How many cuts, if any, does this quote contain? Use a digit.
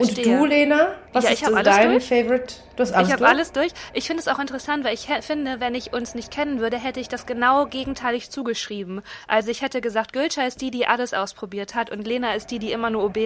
1